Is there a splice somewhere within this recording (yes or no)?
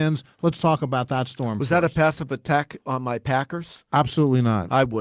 no